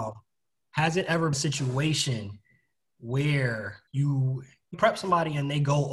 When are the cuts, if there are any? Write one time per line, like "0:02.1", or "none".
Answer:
0:01.3
0:03.9
0:04.7